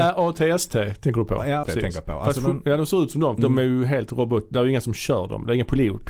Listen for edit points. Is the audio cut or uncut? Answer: cut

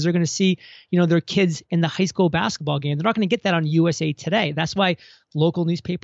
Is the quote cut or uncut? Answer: uncut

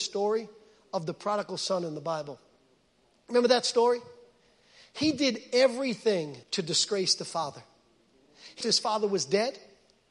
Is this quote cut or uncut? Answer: cut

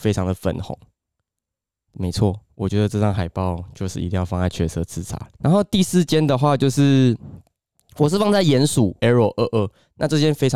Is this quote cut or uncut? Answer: cut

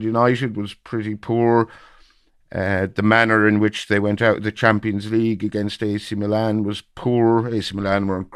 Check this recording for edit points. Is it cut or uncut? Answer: uncut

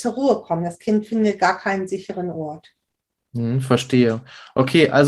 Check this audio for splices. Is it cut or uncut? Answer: uncut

